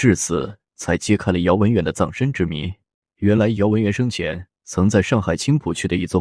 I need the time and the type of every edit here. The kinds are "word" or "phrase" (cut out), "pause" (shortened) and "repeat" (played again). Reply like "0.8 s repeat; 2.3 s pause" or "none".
3.0 s pause